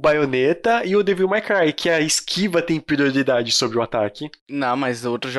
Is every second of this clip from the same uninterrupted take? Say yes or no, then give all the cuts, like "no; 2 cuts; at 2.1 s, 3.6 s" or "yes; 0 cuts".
yes; 0 cuts